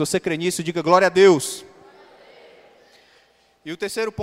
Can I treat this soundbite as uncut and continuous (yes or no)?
yes